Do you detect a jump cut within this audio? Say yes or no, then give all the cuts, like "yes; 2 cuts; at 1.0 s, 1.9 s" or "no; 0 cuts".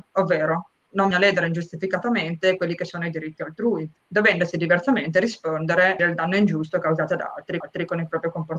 yes; 4 cuts; at 1.1 s, 4.0 s, 6.0 s, 7.6 s